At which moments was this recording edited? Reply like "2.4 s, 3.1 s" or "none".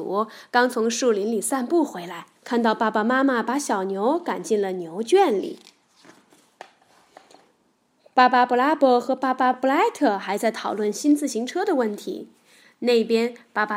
2.4 s